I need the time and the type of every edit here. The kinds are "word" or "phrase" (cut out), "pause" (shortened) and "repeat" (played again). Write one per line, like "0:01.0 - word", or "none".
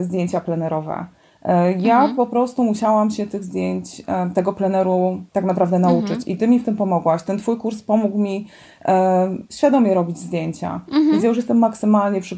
0:05.3 - pause
0:09.5 - pause